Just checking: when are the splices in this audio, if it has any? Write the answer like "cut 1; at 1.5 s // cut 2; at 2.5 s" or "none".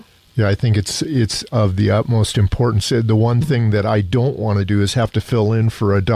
none